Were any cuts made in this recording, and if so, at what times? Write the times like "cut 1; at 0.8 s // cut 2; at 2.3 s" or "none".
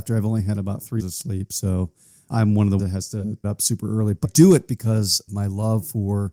cut 1; at 1.0 s // cut 2; at 2.3 s // cut 3; at 2.8 s // cut 4; at 3.4 s // cut 5; at 4.2 s // cut 6; at 5.3 s